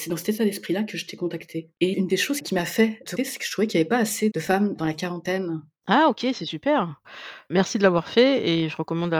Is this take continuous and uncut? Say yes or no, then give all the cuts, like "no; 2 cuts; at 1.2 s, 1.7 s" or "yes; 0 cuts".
no; 2 cuts; at 1.7 s, 3.2 s